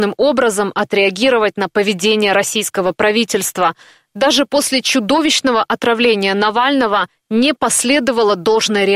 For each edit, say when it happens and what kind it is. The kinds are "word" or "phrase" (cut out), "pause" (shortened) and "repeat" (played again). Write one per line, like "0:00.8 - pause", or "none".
none